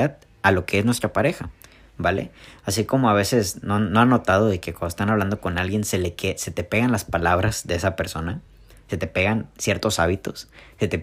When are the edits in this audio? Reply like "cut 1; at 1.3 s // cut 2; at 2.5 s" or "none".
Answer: none